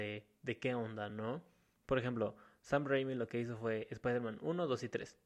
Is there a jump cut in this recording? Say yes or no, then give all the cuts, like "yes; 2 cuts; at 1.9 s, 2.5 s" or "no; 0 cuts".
no; 0 cuts